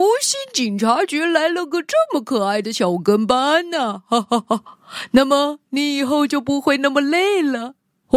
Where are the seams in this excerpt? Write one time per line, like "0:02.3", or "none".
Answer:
none

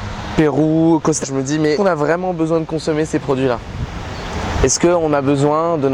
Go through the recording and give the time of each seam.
0:01.2
0:01.7

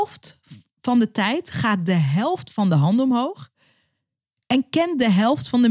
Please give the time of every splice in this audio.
none

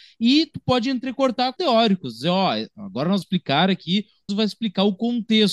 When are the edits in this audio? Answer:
0:01.6
0:03.2
0:04.3

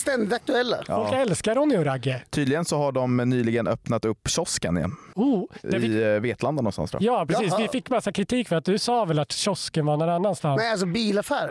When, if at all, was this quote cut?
none

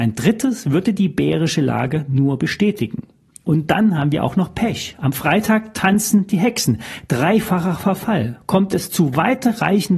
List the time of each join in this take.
none

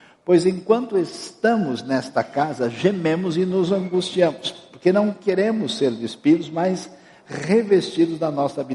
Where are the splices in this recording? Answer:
none

